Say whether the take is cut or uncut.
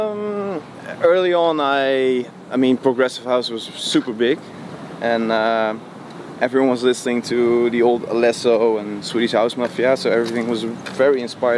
uncut